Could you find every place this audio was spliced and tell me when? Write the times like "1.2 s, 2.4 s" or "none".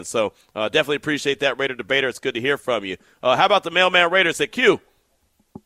none